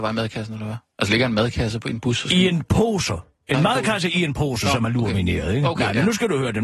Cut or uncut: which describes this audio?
uncut